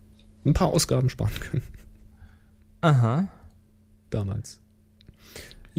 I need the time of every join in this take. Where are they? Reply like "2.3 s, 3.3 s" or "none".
none